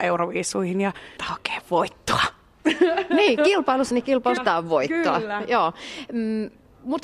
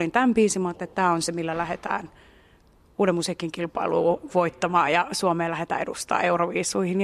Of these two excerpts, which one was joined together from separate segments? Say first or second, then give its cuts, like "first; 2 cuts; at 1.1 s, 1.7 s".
first; 3 cuts; at 1.2 s, 3.9 s, 4.4 s